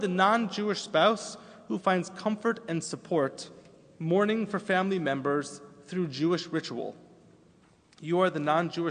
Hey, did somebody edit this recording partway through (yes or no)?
no